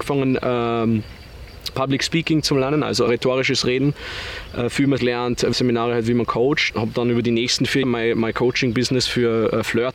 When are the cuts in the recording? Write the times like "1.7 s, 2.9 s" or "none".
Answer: 1.7 s, 3.1 s, 5.0 s, 5.5 s, 6.7 s, 7.8 s